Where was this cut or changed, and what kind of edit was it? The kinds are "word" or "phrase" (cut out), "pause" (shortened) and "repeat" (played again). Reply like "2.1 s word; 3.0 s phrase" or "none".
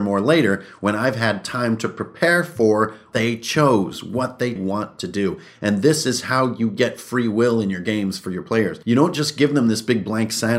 3.1 s word; 4.6 s phrase; 8.8 s pause